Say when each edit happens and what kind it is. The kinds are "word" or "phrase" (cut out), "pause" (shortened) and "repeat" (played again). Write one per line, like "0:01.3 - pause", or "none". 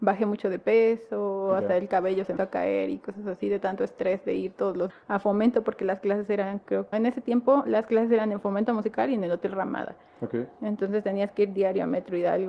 0:02.4 - word
0:04.9 - word
0:06.9 - word

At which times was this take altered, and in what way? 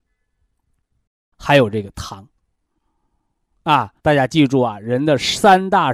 0:04.0 - pause

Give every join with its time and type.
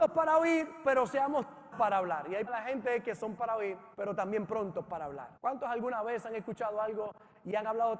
0:01.7 - word
0:02.5 - word
0:03.4 - word
0:03.9 - pause
0:05.4 - pause

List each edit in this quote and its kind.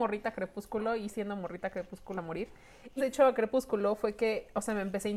0:01.1 - word
0:02.2 - word
0:03.0 - word

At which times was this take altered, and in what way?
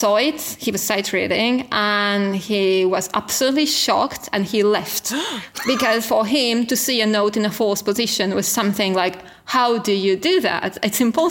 none

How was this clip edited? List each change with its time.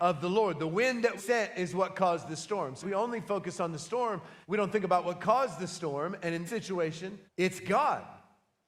0:01.2 - word
0:02.8 - word
0:04.4 - pause
0:06.5 - word
0:07.3 - pause

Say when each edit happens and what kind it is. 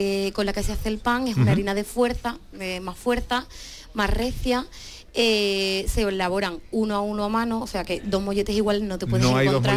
none

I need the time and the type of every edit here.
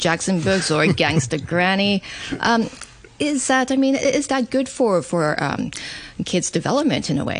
none

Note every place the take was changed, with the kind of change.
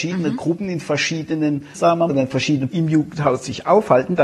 0:01.8 - word
0:02.1 - word
0:02.7 - word

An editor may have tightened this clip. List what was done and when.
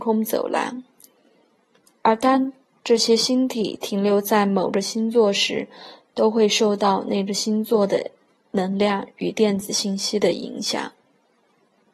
none

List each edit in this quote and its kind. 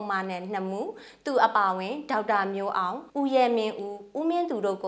0:03.1 - pause

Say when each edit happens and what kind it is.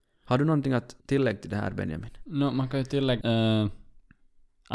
0:01.0 - pause
0:03.2 - word

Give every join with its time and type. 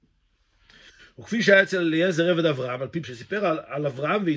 0:03.0 - word

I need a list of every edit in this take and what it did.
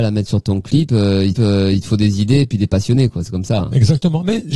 0:01.3 - repeat

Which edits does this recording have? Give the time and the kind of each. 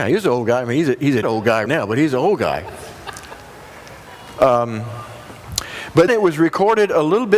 0:01.2 - word
0:01.7 - word
0:06.1 - word

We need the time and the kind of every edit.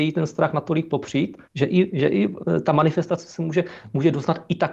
0:01.4 - pause

